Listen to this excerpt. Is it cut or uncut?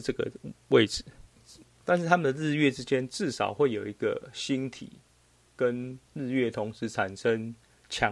uncut